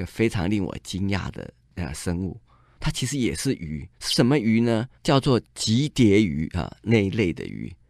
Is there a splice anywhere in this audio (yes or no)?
yes